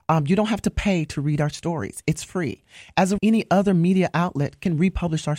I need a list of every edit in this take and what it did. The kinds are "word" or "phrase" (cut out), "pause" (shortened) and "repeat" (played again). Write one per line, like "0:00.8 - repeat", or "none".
0:03.2 - word

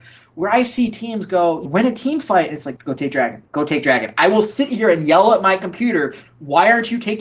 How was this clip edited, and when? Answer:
0:01.6 - word
0:02.8 - word
0:03.5 - pause

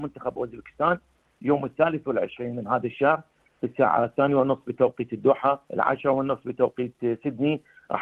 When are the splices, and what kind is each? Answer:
0:05.6 - pause

